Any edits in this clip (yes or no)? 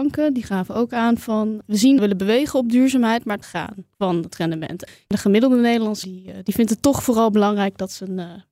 yes